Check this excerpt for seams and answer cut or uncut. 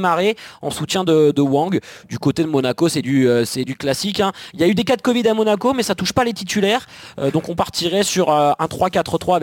uncut